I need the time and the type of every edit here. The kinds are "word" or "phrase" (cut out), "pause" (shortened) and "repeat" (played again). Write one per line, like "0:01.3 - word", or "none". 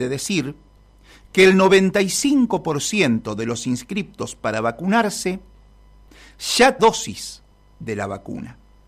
0:06.8 - phrase